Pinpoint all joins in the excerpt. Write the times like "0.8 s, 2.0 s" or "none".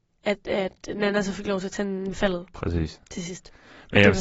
2.1 s